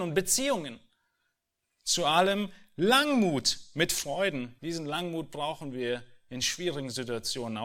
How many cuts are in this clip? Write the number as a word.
one